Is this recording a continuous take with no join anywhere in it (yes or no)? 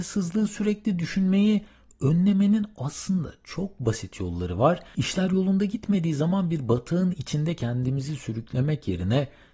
yes